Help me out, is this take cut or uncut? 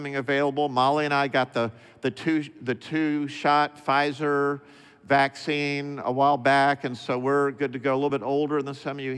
uncut